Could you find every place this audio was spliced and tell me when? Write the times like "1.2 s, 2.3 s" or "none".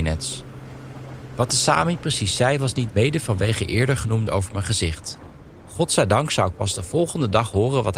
2.9 s, 4.3 s